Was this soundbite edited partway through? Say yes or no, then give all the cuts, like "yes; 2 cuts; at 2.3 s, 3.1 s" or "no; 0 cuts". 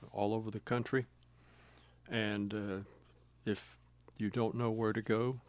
no; 0 cuts